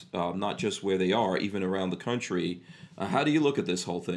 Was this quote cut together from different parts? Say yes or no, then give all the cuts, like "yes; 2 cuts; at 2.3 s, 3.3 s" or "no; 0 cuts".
no; 0 cuts